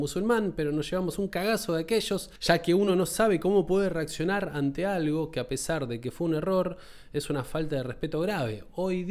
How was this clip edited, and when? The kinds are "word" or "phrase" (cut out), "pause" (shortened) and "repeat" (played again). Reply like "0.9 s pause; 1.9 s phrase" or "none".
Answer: none